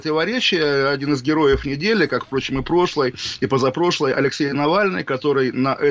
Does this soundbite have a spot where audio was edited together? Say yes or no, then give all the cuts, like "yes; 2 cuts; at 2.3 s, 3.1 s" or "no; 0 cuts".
no; 0 cuts